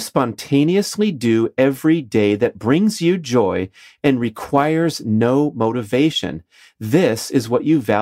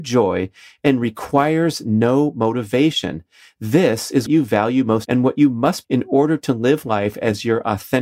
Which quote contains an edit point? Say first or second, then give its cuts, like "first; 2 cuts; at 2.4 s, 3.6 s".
second; 3 cuts; at 4.3 s, 5.1 s, 5.8 s